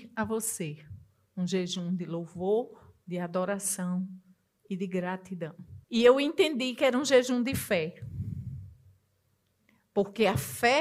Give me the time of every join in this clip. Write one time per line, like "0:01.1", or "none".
0:05.8

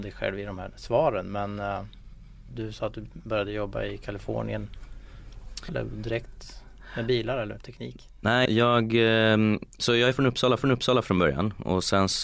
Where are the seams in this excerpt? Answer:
0:02.5
0:05.7
0:08.5
0:10.6

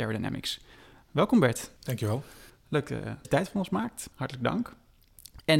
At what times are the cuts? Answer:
0:01.8
0:03.2
0:04.1

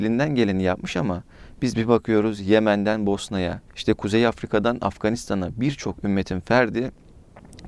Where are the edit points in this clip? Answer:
0:03.7

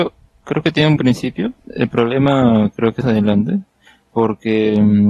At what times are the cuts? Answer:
0:01.0
0:01.6
0:03.0

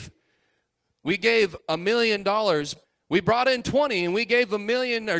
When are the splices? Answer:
0:01.6
0:02.8

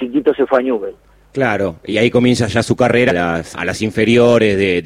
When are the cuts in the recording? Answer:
0:01.9
0:03.1
0:03.5

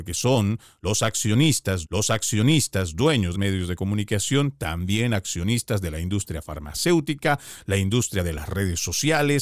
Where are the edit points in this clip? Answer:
0:01.8
0:03.3

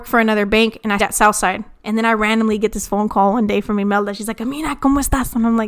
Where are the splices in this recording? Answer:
0:01.0
0:02.9

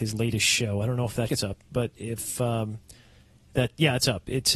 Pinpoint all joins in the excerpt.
0:01.3

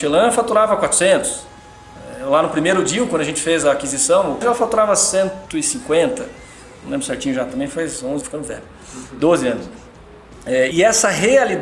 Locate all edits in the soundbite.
0:04.4
0:08.2
0:10.7

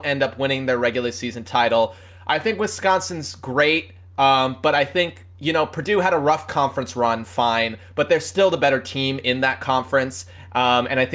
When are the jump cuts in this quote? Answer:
none

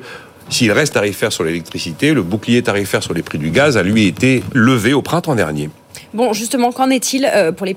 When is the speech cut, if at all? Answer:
0:00.9
0:04.5

